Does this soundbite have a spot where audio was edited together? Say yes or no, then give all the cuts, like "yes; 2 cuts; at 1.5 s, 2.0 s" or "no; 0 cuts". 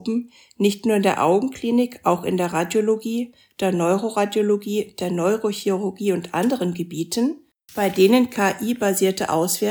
no; 0 cuts